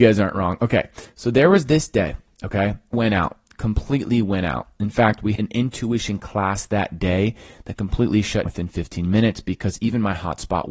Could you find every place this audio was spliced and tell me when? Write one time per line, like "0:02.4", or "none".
0:02.9
0:05.4
0:08.5